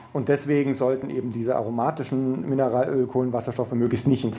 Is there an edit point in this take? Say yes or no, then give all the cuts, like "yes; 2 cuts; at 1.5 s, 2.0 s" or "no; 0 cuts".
no; 0 cuts